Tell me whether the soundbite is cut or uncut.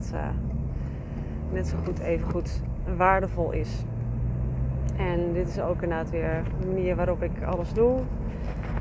uncut